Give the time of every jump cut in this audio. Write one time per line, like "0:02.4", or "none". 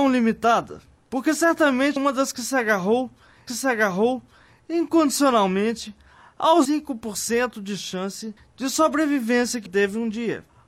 0:02.0
0:03.5
0:06.6
0:08.4
0:09.7